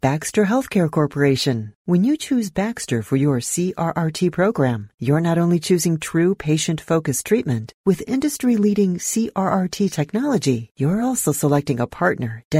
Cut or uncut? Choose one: uncut